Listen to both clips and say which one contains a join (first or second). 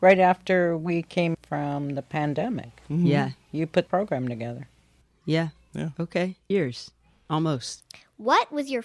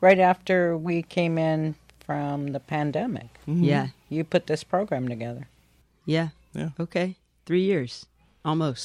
first